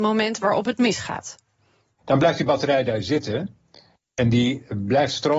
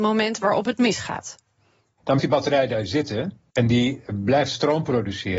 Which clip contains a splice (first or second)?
second